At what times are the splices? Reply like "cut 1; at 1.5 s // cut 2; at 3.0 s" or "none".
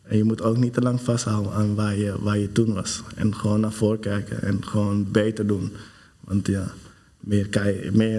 none